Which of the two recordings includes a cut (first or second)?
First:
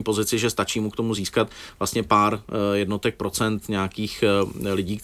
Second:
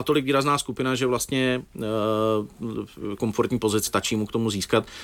second